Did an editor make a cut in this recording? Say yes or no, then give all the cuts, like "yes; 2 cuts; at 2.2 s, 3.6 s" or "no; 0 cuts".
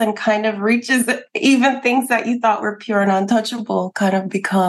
no; 0 cuts